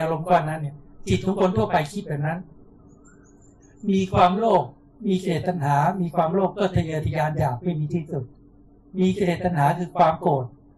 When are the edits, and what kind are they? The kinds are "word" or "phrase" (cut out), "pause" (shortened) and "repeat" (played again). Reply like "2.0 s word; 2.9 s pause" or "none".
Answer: none